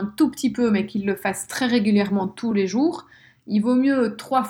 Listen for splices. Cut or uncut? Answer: uncut